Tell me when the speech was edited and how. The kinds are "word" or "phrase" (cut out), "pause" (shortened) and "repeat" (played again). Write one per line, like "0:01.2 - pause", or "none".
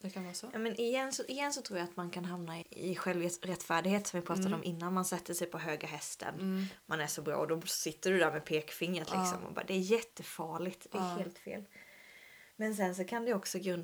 0:02.6 - word
0:12.5 - pause